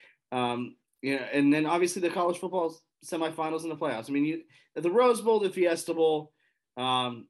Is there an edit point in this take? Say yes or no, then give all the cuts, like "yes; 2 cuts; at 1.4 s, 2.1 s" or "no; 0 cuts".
no; 0 cuts